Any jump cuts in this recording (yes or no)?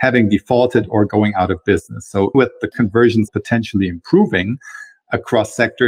yes